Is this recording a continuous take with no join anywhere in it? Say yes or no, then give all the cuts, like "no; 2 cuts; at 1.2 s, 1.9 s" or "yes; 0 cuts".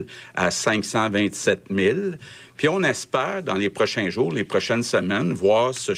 yes; 0 cuts